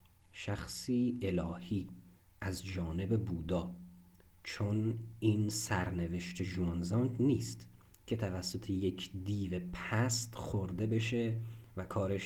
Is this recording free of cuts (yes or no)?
no